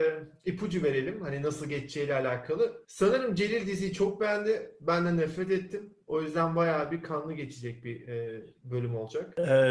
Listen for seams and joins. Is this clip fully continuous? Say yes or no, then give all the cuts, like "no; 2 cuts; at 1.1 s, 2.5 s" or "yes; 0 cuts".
yes; 0 cuts